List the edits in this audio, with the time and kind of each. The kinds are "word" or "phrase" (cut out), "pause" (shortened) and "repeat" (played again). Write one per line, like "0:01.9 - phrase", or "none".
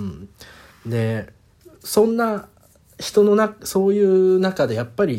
none